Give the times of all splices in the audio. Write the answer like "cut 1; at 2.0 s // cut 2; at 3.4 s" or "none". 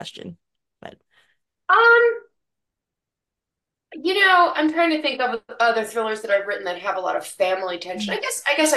none